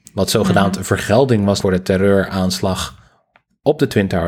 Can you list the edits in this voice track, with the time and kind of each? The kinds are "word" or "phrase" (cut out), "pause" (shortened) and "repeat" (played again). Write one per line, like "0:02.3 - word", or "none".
0:01.6 - word